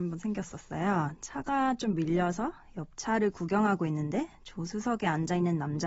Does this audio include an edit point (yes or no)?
no